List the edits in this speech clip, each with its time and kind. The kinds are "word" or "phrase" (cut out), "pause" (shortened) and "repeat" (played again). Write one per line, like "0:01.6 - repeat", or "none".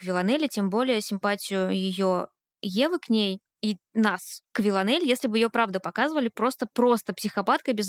0:04.4 - pause
0:06.7 - pause